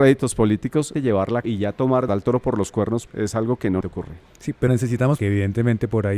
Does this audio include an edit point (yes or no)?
yes